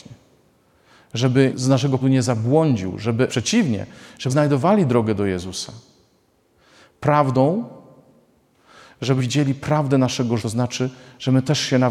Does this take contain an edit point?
yes; 6 cuts; at 1.5 s, 2.0 s, 3.3 s, 4.3 s, 9.2 s, 10.4 s

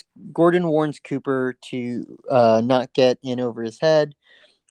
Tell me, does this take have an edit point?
no; 0 cuts

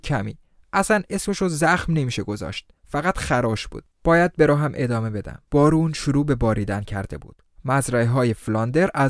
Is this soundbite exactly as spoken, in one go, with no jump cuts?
no; 3 cuts; at 2.8 s, 3.9 s, 5.5 s

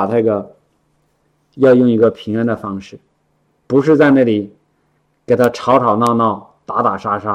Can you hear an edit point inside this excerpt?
no; 0 cuts

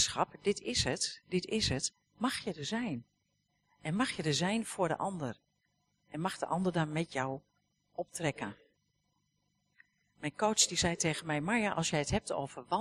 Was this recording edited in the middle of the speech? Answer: no; 0 cuts

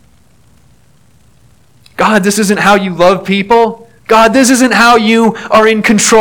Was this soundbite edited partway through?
yes; 1 cut; at 4.0 s

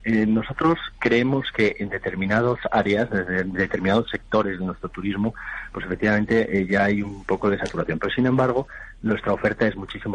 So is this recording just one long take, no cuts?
yes; 0 cuts

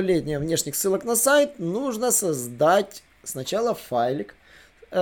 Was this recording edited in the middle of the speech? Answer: no; 0 cuts

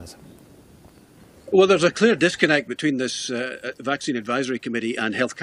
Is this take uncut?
yes; 0 cuts

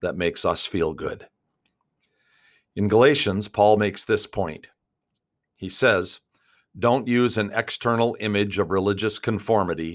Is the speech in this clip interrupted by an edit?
no; 0 cuts

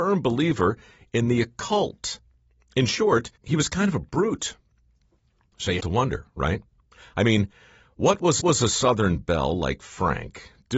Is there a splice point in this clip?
yes; 3 cuts; at 3.4 s, 5.8 s, 8.4 s

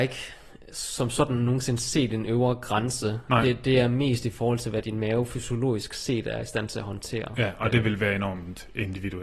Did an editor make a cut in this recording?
no; 0 cuts

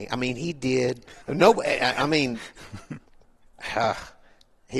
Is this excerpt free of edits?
no; 1 cut; at 1.2 s

